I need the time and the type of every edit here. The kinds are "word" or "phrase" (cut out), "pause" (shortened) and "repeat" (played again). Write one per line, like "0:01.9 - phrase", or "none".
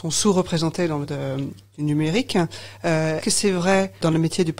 0:01.0 - word
0:03.2 - word